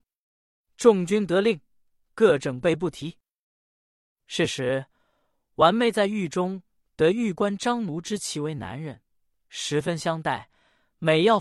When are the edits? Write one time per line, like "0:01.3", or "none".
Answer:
none